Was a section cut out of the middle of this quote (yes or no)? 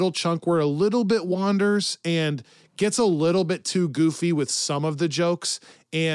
no